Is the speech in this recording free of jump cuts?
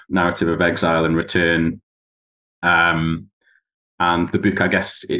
yes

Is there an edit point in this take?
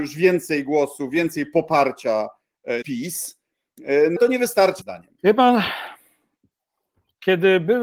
yes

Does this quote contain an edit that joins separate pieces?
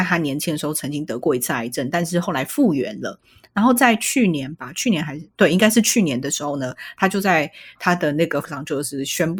yes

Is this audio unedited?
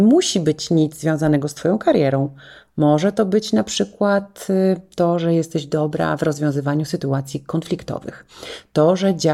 yes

